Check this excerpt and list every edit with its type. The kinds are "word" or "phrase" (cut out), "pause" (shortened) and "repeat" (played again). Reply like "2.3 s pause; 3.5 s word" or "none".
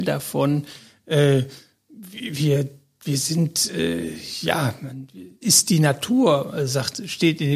5.4 s phrase